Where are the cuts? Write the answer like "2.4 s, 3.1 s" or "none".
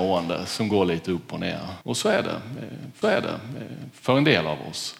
1.8 s, 3.0 s